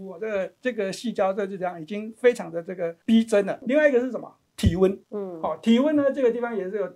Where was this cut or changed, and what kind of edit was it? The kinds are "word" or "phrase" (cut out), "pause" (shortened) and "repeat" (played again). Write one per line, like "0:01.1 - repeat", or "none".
0:05.0 - pause